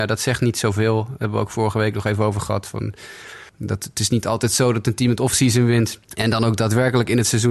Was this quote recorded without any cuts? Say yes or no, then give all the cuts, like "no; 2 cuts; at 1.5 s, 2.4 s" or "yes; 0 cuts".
no; 2 cuts; at 3.5 s, 6.0 s